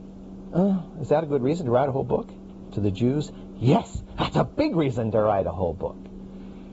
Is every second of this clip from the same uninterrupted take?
yes; 0 cuts

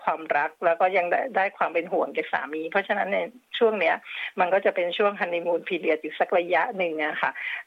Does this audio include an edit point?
no; 0 cuts

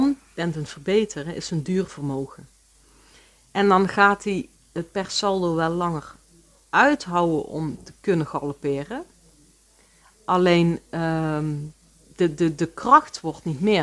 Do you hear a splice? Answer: no; 0 cuts

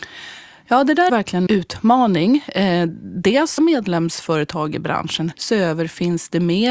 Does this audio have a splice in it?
yes; 4 cuts; at 1.1 s, 1.5 s, 3.6 s, 5.3 s

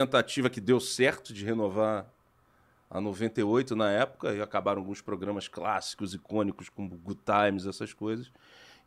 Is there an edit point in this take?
no; 0 cuts

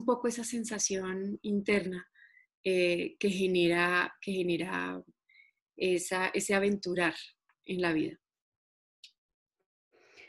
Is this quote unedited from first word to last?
yes; 0 cuts

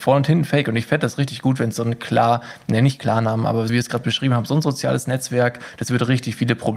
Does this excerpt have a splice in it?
yes; 1 cut; at 3.7 s

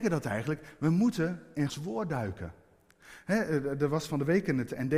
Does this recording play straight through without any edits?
no; 1 cut; at 1.7 s

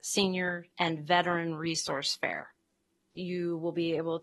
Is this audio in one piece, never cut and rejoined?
yes; 0 cuts

